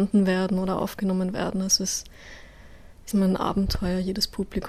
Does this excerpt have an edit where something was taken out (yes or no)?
yes